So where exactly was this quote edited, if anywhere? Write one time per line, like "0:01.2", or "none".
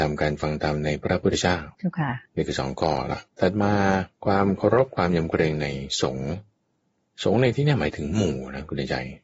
0:01.7
0:02.3
0:03.3
0:04.1